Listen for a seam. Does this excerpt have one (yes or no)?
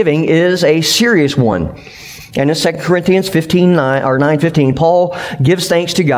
no